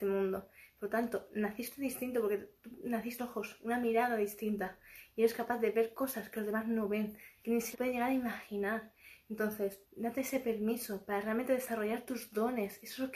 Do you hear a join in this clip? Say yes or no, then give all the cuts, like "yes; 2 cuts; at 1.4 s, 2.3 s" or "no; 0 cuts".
yes; 3 cuts; at 3.2 s, 7.7 s, 9.8 s